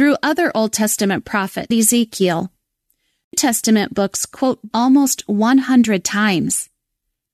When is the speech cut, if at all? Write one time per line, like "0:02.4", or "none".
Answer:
0:01.7
0:03.3
0:04.7

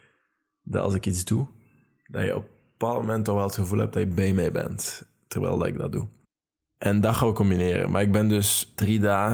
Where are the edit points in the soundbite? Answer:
none

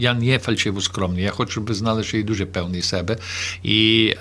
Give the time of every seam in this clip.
none

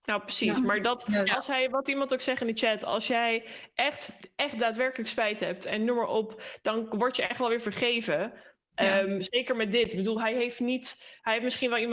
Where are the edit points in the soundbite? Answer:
none

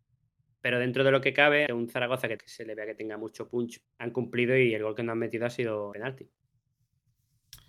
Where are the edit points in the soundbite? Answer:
0:01.7
0:02.4
0:03.8
0:05.9

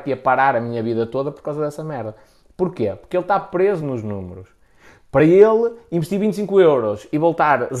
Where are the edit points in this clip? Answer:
none

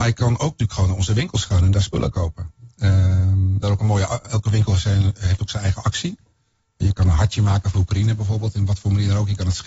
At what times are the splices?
0:03.6

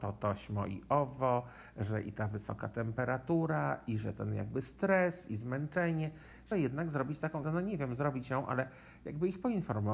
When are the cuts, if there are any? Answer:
0:06.5
0:07.4

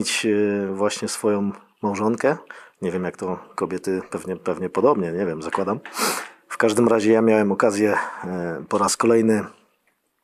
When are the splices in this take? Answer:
none

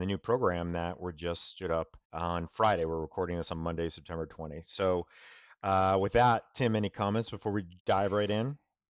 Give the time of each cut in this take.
0:02.0
0:07.8

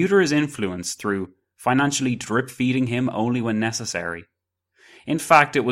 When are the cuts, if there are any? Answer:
none

